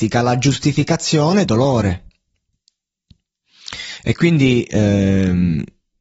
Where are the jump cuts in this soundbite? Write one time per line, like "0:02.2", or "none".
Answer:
0:01.4